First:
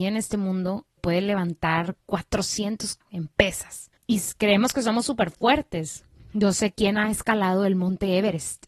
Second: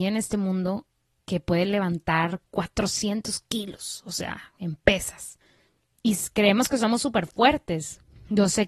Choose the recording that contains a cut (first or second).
first